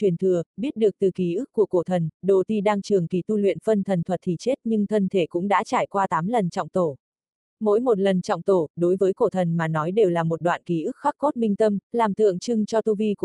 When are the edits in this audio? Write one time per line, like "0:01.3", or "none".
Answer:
none